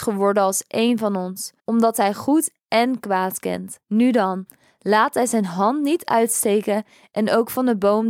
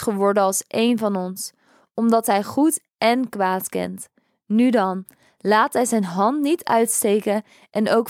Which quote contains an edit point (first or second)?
first